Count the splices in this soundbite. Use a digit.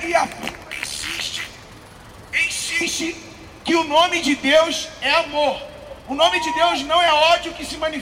0